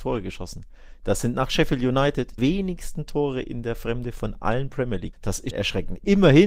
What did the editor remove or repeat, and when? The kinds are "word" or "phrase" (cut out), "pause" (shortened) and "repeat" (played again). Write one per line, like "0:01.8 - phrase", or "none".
0:02.4 - word
0:05.1 - word
0:05.5 - word